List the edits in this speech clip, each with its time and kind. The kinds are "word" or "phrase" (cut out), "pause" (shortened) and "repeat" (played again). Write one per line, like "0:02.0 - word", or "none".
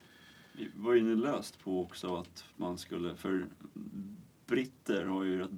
none